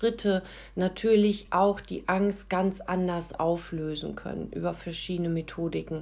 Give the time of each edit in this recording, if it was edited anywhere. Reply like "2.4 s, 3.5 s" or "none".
none